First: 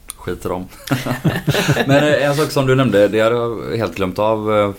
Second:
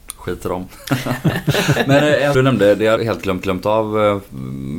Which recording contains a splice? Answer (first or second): second